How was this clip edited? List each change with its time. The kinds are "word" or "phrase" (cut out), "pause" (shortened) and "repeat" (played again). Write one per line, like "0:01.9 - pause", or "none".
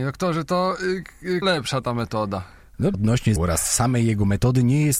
0:01.4 - word
0:02.9 - word
0:03.4 - word